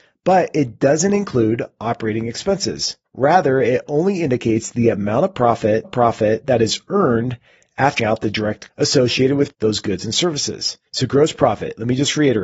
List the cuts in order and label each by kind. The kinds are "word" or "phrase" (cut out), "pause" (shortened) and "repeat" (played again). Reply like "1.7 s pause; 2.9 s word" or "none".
3.0 s pause; 5.8 s repeat; 8.0 s word; 8.7 s word; 9.5 s word; 10.9 s pause